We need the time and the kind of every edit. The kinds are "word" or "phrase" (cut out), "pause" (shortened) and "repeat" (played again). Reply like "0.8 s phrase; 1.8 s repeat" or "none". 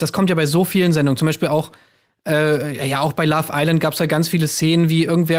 none